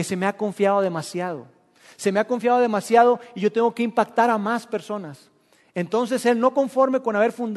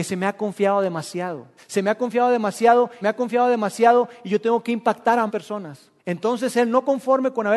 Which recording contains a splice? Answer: second; 4 cuts; at 1.6 s, 3.0 s, 5.3 s, 6.0 s

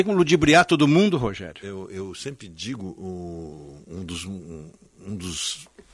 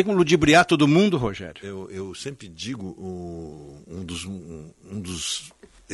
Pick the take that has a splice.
second; 1 cut; at 4.7 s

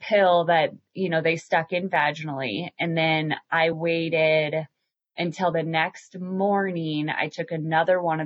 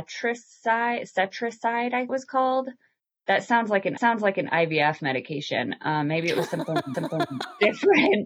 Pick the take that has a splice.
second; 3 cuts; at 2.1 s, 4.0 s, 6.9 s

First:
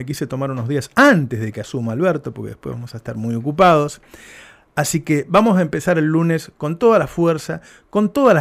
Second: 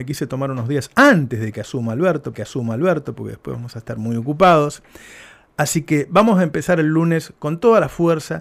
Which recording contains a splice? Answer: second; 1 cut; at 2.3 s

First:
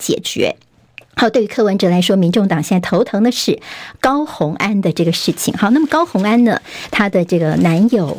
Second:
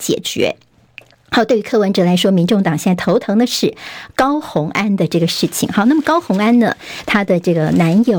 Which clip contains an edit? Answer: first; 1 cut; at 1.0 s

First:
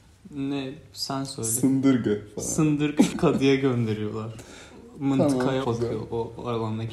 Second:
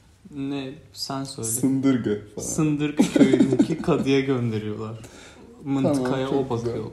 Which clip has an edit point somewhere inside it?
first; 2 cuts; at 3.1 s, 5.6 s

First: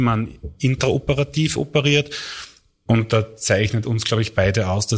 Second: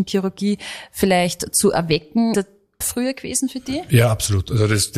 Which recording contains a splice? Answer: second; 2 cuts; at 2.3 s, 2.8 s

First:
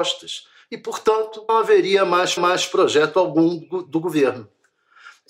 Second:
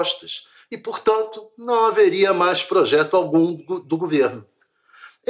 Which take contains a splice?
first; 2 cuts; at 1.5 s, 2.4 s

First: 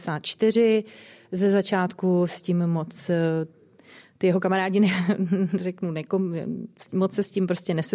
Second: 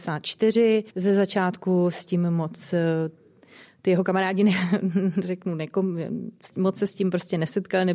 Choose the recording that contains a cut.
second; 1 cut; at 0.9 s

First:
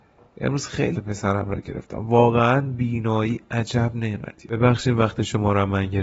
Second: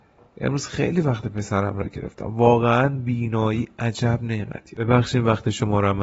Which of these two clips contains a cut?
first; 1 cut; at 0.9 s

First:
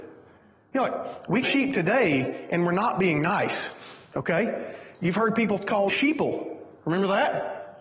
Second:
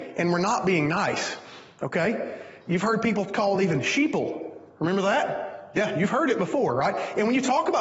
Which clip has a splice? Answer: first; 2 cuts; at 1.4 s, 5.9 s

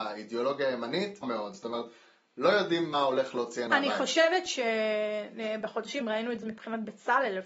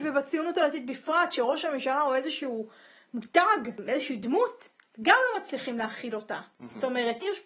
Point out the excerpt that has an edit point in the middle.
first; 5 cuts; at 1.2 s, 2.9 s, 3.7 s, 6.0 s, 6.4 s

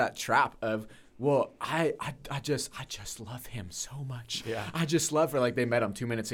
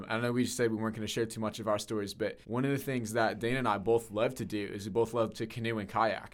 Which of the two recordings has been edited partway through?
second; 1 cut; at 2.4 s

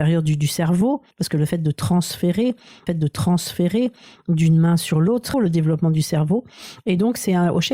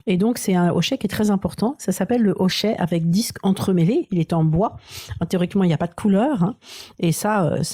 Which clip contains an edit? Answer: first; 3 cuts; at 1.1 s, 2.9 s, 5.3 s

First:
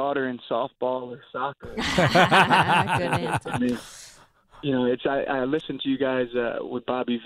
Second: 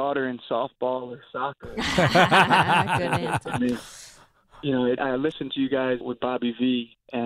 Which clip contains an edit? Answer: second; 2 cuts; at 5.0 s, 6.0 s

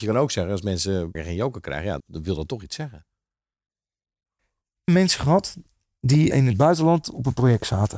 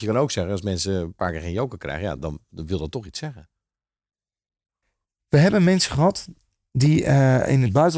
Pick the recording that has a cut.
first; 4 cuts; at 1.1 s, 2.0 s, 4.9 s, 6.3 s

